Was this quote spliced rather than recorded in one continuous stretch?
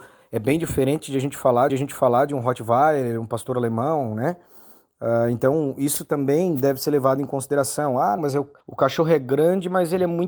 yes; 3 cuts; at 1.7 s, 8.2 s, 8.6 s

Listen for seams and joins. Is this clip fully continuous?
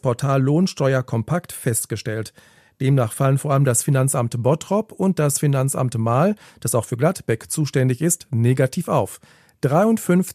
yes; 0 cuts

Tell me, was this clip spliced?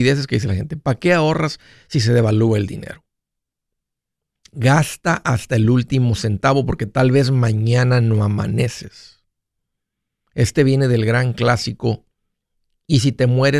no; 0 cuts

